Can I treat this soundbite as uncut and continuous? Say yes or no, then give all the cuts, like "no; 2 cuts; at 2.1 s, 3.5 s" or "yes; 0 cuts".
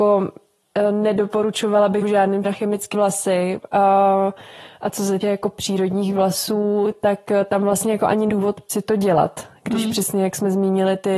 no; 6 cuts; at 2.0 s, 2.4 s, 2.9 s, 5.2 s, 8.3 s, 8.7 s